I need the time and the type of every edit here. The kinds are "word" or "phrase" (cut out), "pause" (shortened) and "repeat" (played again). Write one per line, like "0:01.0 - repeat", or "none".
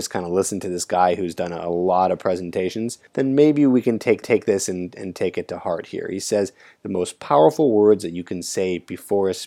0:03.1 - pause
0:04.2 - repeat